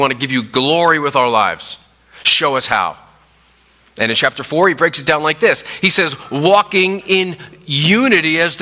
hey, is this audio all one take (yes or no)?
yes